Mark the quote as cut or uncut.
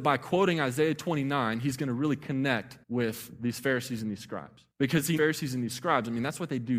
cut